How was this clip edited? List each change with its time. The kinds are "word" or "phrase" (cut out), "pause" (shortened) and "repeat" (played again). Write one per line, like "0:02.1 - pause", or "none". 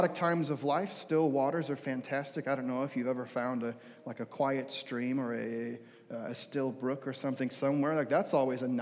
none